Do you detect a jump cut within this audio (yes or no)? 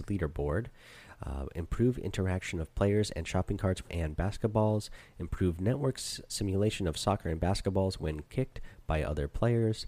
yes